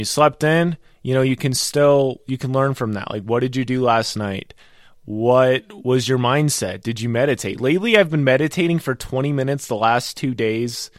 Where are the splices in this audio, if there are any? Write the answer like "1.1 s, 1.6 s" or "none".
none